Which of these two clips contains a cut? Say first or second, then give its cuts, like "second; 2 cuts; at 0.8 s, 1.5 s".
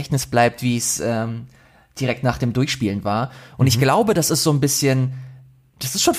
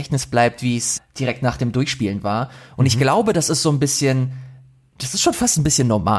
second; 1 cut; at 1.0 s